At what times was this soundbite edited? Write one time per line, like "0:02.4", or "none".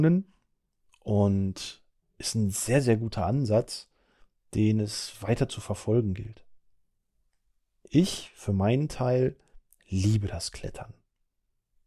none